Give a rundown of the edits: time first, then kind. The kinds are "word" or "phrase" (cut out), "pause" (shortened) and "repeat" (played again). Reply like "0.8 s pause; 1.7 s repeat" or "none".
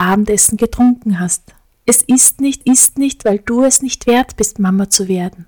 2.6 s repeat